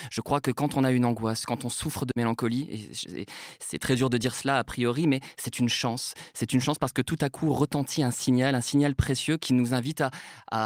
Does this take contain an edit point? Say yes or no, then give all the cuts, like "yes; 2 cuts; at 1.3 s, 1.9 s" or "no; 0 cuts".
no; 0 cuts